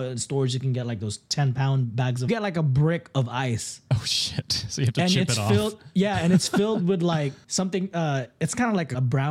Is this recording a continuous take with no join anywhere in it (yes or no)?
no